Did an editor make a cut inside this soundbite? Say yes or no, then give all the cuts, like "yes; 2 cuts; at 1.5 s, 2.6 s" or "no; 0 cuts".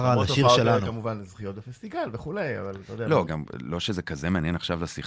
yes; 1 cut; at 3.3 s